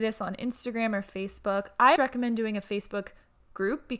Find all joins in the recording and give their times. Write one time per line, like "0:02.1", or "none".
0:02.0